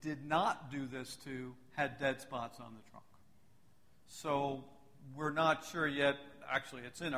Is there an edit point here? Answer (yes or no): no